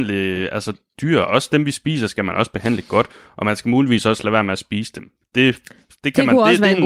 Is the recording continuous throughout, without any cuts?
yes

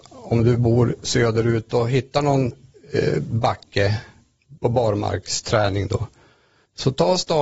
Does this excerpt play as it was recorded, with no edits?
yes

